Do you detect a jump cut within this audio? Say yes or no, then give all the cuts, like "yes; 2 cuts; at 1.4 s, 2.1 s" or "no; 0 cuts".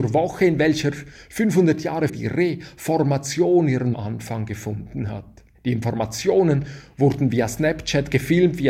yes; 3 cuts; at 2.1 s, 3.9 s, 5.5 s